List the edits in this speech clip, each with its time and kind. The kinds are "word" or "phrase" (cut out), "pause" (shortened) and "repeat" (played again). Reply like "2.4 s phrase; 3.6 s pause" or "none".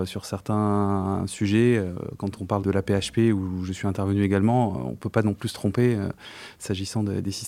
2.6 s word